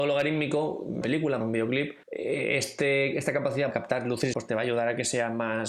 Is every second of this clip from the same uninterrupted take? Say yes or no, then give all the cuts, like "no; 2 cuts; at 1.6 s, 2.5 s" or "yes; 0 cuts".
no; 5 cuts; at 1.0 s, 1.4 s, 2.0 s, 3.7 s, 4.3 s